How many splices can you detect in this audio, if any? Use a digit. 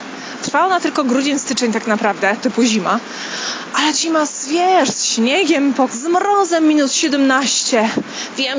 3